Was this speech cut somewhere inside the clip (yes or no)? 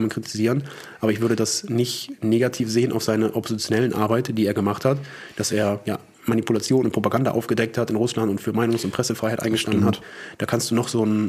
no